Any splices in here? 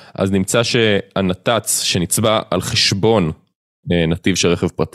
no; 0 cuts

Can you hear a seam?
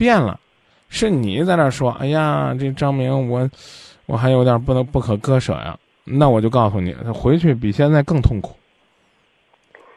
no; 0 cuts

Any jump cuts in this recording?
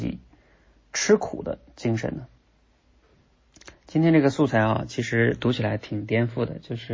yes; 1 cut; at 3.7 s

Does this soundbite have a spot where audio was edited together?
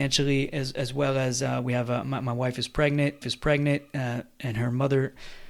yes; 1 cut; at 3.2 s

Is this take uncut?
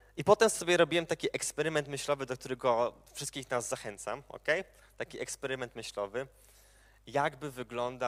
yes; 0 cuts

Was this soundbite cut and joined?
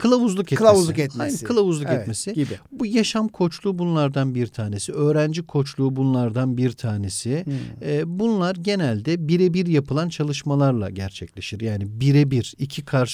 no; 0 cuts

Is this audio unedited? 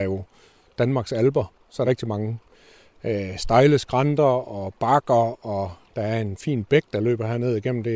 no; 1 cut; at 1.8 s

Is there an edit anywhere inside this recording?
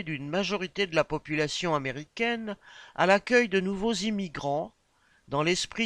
no; 0 cuts

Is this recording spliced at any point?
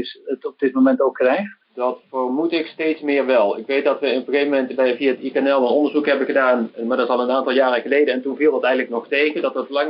yes; 1 cut; at 1.6 s

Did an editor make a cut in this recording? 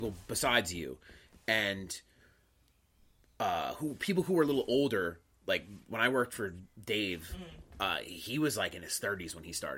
no; 0 cuts

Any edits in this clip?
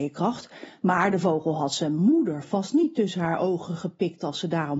no; 0 cuts

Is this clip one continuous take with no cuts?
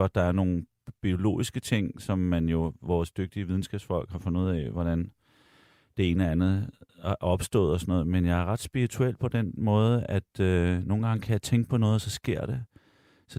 yes; 0 cuts

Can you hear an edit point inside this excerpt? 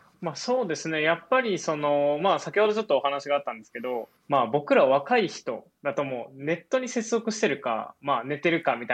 yes; 1 cut; at 4.2 s

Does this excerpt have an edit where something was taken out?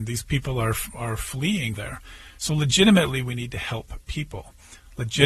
yes; 1 cut; at 1.8 s

